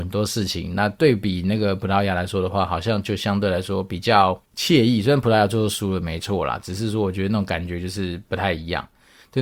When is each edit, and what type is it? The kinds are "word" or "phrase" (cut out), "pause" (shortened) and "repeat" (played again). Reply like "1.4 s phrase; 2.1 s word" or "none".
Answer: 4.4 s pause